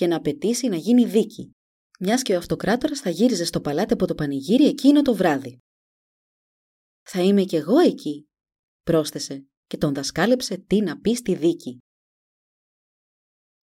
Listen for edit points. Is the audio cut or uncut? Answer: uncut